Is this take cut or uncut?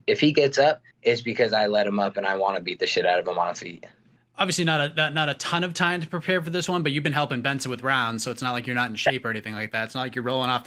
cut